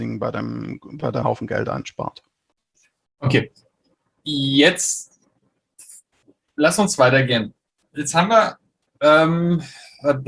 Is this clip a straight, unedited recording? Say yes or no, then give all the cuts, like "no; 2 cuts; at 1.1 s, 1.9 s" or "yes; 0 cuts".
no; 1 cut; at 1.2 s